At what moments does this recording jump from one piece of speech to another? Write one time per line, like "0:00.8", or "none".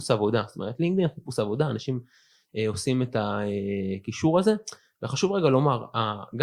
none